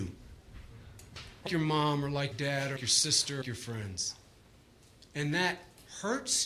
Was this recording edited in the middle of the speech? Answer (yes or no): yes